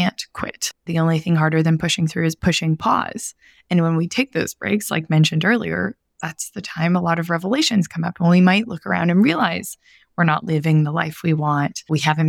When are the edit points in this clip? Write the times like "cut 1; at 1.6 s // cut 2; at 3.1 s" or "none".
none